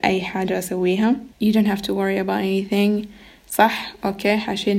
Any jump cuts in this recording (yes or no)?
yes